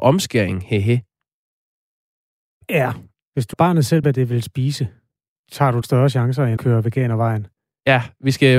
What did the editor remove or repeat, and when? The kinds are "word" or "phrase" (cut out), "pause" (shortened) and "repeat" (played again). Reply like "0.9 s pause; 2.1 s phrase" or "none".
3.5 s word; 4.0 s word; 5.4 s word; 5.8 s word; 6.6 s word